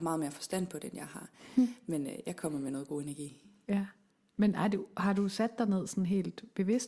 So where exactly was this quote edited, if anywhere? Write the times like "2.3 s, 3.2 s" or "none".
none